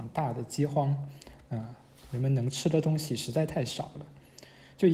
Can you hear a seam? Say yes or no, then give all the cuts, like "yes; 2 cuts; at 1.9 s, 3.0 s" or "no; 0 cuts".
no; 0 cuts